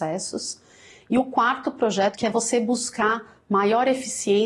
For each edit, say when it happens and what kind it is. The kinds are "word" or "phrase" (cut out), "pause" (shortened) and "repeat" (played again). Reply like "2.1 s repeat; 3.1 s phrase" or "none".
none